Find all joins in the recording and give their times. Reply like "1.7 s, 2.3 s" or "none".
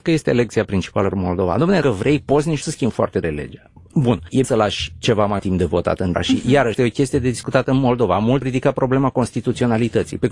1.1 s, 1.8 s, 2.6 s, 3.2 s, 4.4 s, 5.4 s, 6.1 s, 6.7 s, 8.4 s